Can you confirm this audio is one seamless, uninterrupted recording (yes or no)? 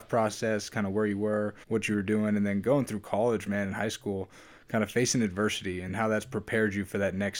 no